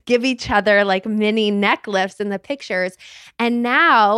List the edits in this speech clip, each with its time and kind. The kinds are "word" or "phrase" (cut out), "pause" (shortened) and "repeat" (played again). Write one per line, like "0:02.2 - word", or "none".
none